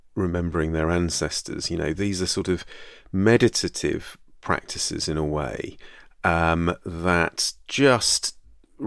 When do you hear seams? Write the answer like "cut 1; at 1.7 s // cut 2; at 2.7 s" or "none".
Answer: none